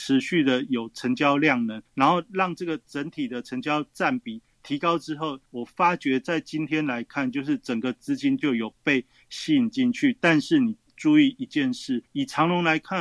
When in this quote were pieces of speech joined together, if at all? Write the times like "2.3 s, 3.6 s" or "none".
1.9 s, 5.5 s, 12.1 s